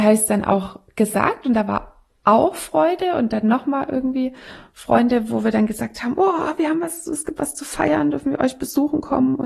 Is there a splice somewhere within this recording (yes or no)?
no